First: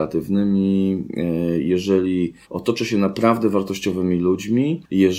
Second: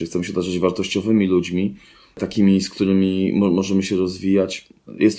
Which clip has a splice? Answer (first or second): first